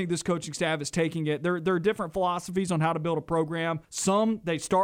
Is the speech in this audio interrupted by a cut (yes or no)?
yes